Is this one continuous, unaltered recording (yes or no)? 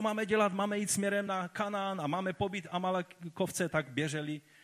yes